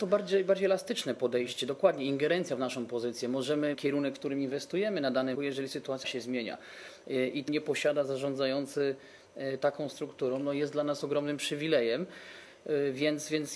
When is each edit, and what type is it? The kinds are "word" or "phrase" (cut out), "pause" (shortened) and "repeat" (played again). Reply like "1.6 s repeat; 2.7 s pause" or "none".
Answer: 3.7 s phrase; 5.3 s word; 6.0 s word; 7.5 s phrase